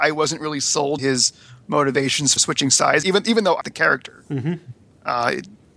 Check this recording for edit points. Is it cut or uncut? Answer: cut